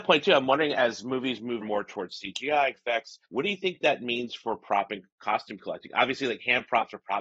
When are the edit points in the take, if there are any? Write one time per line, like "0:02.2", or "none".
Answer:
0:01.6
0:02.7
0:03.2